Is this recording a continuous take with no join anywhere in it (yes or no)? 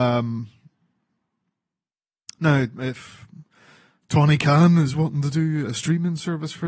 yes